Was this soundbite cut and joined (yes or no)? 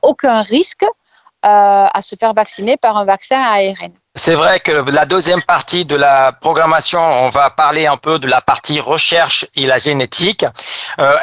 no